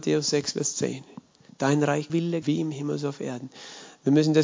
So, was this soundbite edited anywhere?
yes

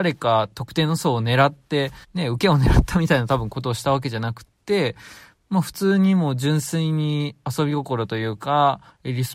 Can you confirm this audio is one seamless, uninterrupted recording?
no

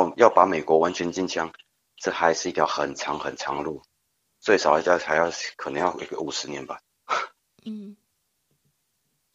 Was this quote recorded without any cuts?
yes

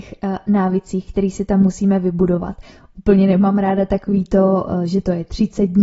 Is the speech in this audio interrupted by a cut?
no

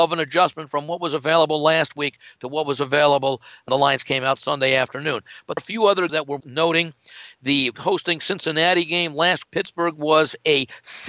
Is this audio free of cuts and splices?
no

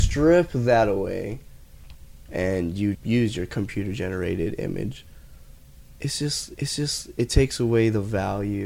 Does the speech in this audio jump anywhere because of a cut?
yes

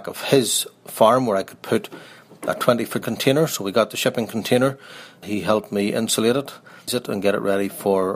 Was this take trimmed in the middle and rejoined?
yes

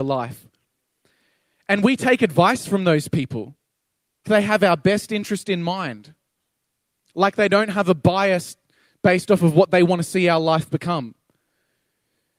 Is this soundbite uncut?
no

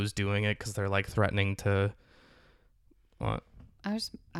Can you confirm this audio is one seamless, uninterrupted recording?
yes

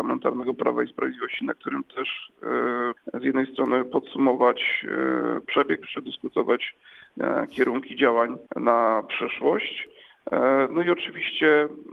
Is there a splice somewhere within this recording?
yes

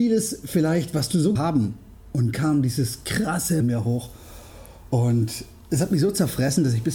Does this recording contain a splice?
yes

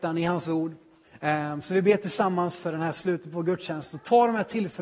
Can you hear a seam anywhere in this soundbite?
no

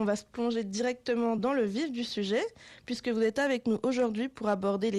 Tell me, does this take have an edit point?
no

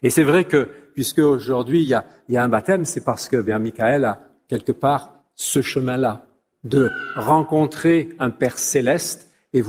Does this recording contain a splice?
no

